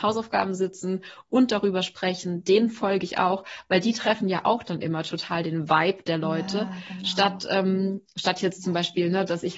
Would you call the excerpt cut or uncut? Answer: uncut